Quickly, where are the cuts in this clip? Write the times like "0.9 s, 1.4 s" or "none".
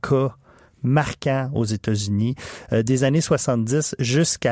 none